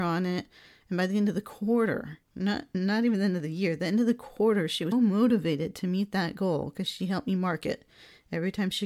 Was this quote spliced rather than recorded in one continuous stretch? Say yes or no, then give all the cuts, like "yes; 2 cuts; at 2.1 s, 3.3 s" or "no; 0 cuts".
yes; 2 cuts; at 2.2 s, 4.9 s